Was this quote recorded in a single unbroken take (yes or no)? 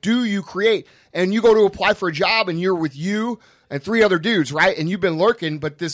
yes